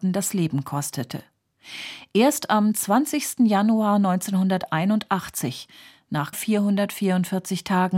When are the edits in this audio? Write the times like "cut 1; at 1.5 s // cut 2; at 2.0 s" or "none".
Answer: cut 1; at 6.3 s